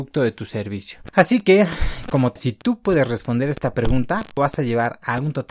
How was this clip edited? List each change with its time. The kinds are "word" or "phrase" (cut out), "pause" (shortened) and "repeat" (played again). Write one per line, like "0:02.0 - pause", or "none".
0:02.4 - word
0:04.4 - word